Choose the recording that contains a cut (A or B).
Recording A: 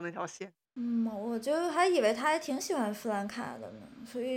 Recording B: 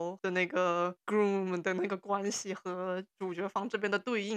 B